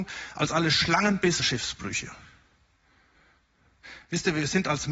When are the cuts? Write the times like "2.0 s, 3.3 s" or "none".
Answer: 1.4 s